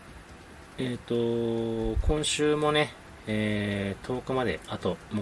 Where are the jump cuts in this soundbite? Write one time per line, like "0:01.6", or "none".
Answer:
none